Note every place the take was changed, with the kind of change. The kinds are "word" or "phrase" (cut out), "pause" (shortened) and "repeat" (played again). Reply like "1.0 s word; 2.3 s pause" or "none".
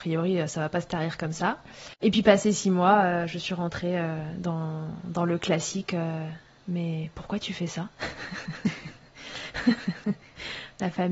1.9 s pause